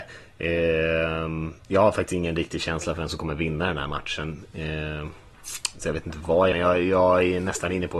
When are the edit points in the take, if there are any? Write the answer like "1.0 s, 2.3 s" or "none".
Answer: 6.5 s